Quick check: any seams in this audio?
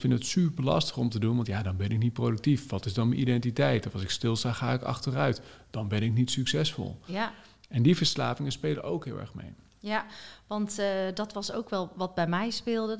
no; 0 cuts

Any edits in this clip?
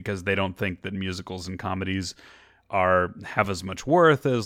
no; 0 cuts

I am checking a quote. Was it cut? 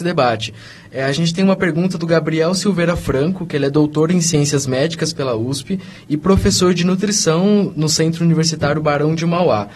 no; 0 cuts

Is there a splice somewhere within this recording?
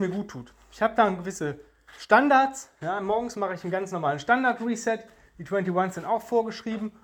no; 0 cuts

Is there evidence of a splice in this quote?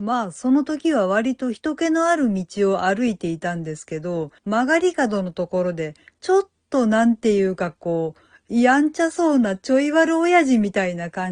yes; 1 cut; at 4.4 s

